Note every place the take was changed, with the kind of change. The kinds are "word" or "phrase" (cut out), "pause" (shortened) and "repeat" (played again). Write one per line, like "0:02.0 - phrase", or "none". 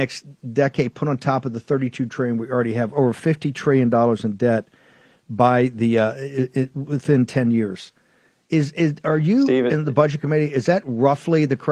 none